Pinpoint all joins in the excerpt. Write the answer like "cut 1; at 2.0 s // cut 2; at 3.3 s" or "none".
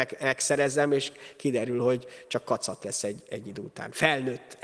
none